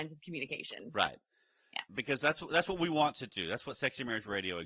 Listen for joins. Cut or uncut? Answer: cut